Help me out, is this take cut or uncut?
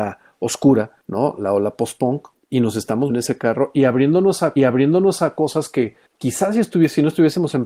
cut